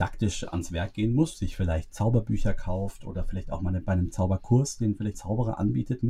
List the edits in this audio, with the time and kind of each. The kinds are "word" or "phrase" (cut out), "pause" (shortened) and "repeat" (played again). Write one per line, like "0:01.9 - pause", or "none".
0:05.1 - word